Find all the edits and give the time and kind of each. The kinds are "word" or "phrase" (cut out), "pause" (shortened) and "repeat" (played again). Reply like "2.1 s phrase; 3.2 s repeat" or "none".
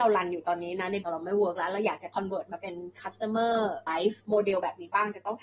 1.0 s word; 3.9 s word